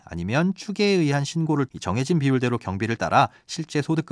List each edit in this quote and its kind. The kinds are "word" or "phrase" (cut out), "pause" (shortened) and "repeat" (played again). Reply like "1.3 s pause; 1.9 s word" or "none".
1.7 s word; 3.0 s word